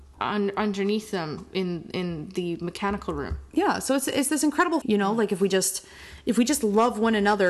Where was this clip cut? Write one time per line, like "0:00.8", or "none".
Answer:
0:04.8